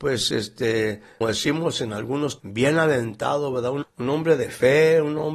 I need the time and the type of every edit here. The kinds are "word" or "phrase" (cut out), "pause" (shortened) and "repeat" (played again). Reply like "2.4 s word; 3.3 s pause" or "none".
1.2 s word; 2.4 s word; 3.8 s word